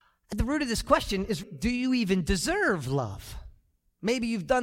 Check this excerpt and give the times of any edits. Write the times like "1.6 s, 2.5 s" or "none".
1.4 s